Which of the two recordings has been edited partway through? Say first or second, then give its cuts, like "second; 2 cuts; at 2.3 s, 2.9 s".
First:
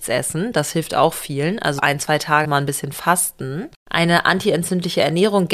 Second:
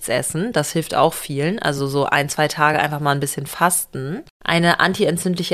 first; 2 cuts; at 1.8 s, 2.4 s